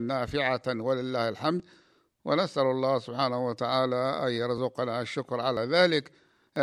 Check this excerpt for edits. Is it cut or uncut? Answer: uncut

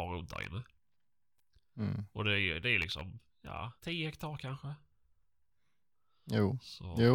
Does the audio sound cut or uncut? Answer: cut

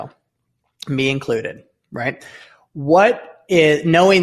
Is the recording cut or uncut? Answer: uncut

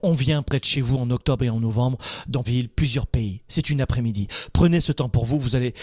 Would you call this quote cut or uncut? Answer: cut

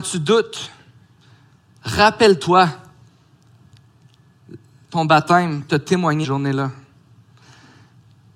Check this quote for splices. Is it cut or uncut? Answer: cut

